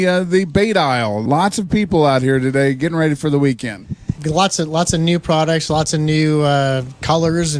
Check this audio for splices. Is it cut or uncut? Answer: uncut